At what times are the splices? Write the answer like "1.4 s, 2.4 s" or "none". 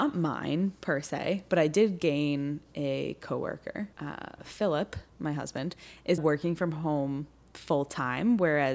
3.9 s, 5.1 s, 6.2 s